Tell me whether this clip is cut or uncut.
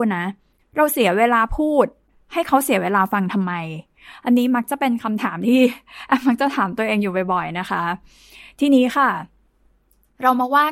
uncut